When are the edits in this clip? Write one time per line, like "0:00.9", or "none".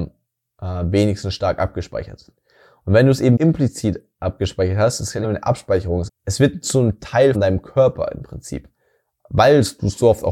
0:03.4
0:05.2
0:06.1
0:07.3